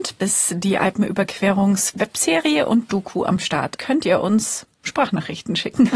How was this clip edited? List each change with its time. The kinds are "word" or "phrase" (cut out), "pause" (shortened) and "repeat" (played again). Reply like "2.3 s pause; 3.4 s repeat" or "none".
3.8 s word

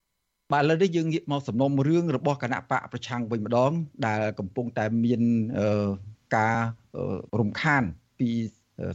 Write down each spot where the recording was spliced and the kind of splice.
7.3 s pause

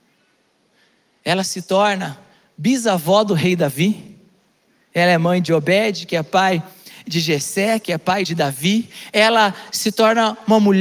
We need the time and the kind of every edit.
none

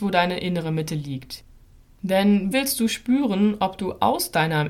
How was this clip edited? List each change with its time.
2.5 s word

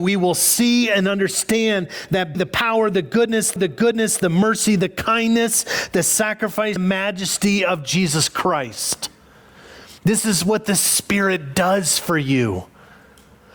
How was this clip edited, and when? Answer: 2.3 s word; 3.6 s repeat; 6.8 s word; 10.0 s pause

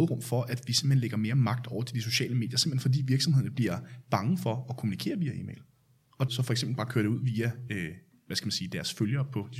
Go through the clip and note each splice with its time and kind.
6.3 s word

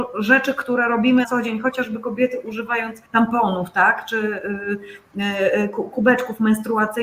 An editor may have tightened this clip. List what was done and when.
1.2 s word; 3.1 s pause

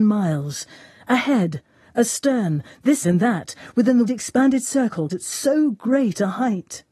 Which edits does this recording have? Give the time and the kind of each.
3.0 s word; 4.1 s word; 5.1 s word

